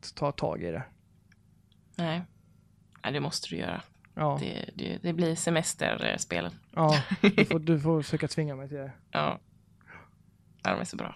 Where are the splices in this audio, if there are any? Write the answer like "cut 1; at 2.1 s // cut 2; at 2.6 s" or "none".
cut 1; at 6.6 s